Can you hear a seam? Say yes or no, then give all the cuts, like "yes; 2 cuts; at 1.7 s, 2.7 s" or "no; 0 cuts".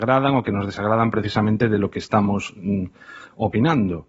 no; 0 cuts